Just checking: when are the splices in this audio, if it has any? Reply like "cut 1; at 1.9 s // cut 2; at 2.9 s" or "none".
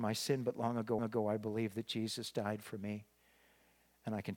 cut 1; at 1.0 s